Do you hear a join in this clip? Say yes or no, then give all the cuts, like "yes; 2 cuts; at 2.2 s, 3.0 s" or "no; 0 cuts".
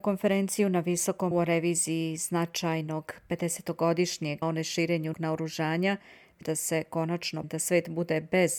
yes; 5 cuts; at 1.3 s, 4.4 s, 5.1 s, 6.4 s, 7.4 s